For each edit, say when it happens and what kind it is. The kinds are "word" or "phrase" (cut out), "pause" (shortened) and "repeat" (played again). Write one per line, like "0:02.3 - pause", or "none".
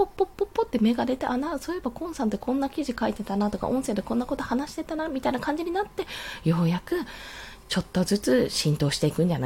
none